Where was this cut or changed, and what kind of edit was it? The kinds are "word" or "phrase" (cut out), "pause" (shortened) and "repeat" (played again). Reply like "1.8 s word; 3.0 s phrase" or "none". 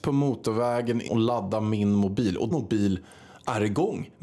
1.1 s word; 2.5 s word

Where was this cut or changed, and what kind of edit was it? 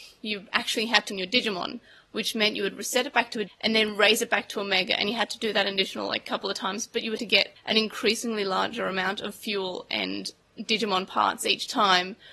1.1 s word; 3.5 s word; 7.2 s word

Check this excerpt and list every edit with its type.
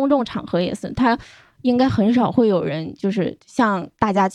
none

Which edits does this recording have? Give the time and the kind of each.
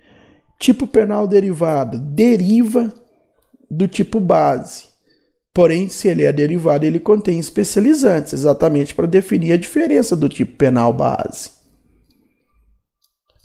none

